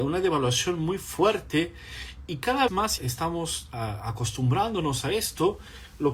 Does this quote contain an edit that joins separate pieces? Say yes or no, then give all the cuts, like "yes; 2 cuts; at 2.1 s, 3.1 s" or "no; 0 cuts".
yes; 2 cuts; at 2.7 s, 3.0 s